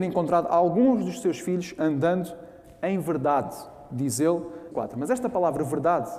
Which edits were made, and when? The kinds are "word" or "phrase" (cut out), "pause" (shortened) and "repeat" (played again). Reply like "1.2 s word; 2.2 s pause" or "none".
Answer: 4.7 s phrase